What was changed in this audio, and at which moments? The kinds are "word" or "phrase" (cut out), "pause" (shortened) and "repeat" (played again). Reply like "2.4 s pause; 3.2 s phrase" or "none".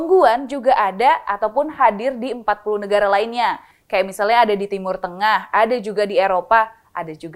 none